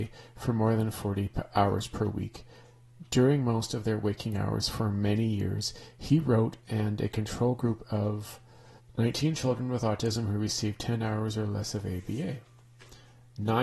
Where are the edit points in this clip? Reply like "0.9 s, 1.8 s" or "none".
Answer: 8.8 s